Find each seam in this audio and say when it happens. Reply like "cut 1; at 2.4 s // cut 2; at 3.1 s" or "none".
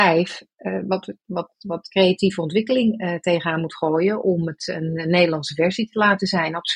none